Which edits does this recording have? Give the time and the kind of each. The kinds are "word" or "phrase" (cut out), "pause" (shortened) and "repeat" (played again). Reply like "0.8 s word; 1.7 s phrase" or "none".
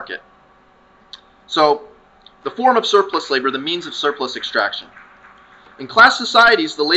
none